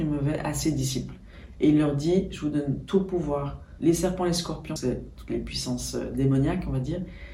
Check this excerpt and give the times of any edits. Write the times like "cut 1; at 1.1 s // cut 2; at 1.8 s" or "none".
cut 1; at 3.8 s // cut 2; at 4.8 s